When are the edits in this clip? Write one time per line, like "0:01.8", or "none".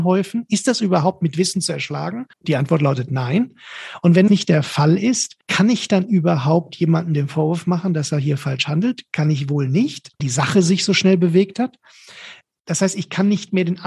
0:02.3
0:04.3
0:05.4
0:10.2